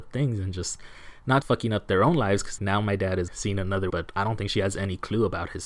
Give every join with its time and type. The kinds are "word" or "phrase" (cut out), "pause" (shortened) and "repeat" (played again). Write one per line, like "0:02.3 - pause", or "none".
0:01.4 - word
0:02.6 - word
0:03.3 - word
0:03.9 - word